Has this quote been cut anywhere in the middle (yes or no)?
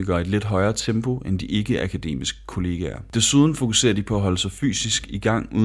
no